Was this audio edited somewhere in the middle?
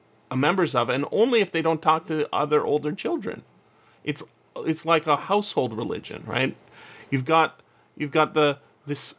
no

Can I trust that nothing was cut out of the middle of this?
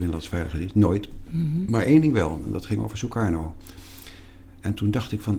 yes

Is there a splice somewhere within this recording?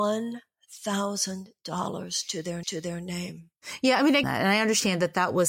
yes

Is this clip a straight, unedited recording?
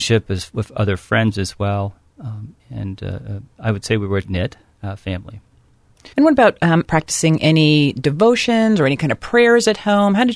no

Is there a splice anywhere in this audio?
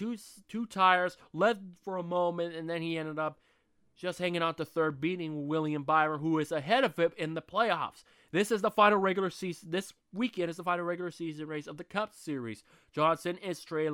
no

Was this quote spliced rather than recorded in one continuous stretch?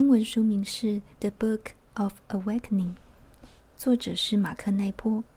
yes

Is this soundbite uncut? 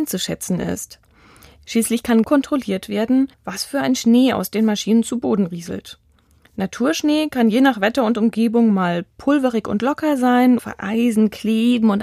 no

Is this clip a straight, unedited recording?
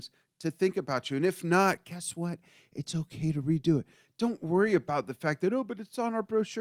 yes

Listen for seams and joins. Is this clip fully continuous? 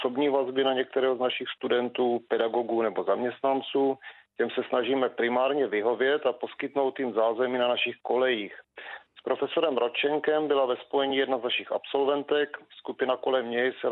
yes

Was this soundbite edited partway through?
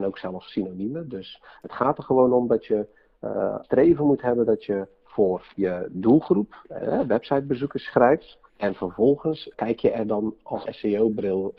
yes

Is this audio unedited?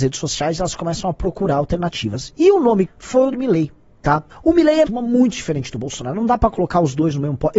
no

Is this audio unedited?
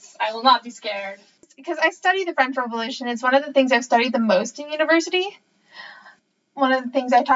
yes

